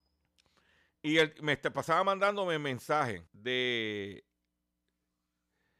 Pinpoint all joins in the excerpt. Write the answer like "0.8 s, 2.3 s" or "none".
3.3 s